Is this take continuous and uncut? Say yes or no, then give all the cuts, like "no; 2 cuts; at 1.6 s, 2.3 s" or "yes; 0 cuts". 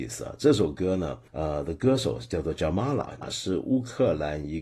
no; 2 cuts; at 1.3 s, 3.2 s